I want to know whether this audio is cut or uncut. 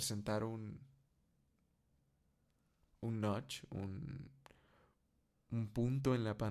uncut